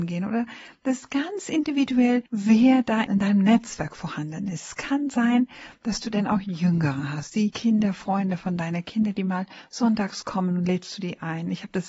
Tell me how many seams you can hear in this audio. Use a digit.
1